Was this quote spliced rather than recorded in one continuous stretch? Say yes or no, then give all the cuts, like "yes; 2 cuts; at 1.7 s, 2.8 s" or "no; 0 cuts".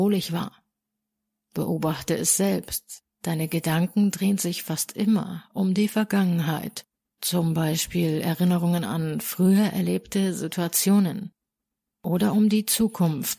no; 0 cuts